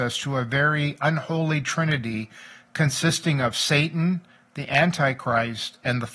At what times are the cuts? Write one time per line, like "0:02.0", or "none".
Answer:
none